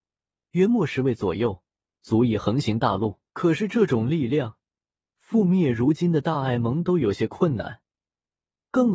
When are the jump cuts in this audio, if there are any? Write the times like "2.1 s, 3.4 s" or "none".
3.3 s